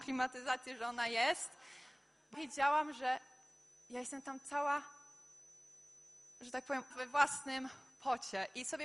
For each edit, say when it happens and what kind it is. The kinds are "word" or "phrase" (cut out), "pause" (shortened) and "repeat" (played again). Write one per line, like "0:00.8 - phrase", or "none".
0:02.3 - word
0:06.9 - word